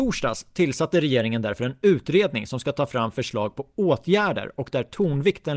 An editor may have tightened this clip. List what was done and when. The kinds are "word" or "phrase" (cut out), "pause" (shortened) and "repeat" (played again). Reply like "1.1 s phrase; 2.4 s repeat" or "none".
none